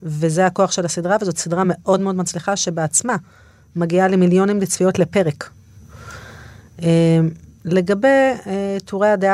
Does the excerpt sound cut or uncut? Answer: uncut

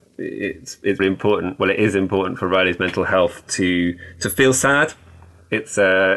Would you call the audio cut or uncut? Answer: cut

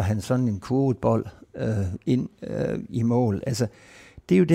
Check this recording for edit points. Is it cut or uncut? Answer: uncut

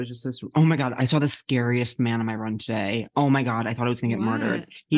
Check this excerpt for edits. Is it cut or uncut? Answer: uncut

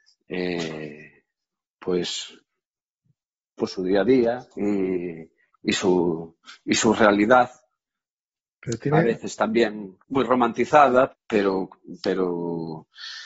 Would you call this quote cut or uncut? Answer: cut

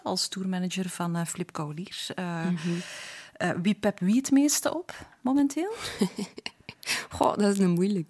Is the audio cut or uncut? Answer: cut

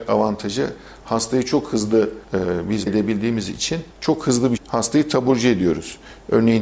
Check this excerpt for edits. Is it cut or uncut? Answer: cut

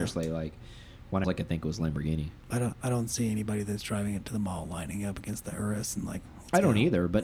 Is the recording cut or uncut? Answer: cut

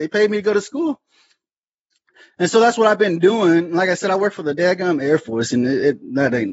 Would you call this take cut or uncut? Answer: uncut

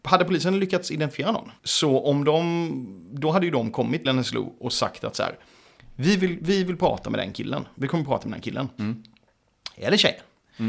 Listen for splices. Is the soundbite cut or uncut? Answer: cut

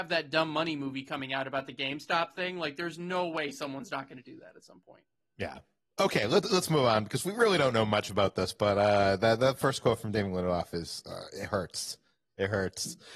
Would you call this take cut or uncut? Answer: cut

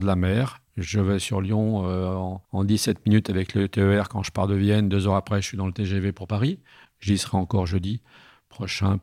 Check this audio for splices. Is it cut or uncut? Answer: cut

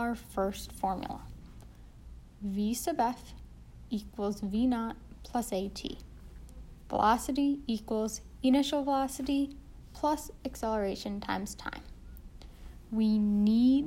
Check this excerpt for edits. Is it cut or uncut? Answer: uncut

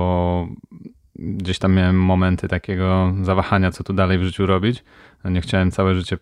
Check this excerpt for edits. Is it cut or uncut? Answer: uncut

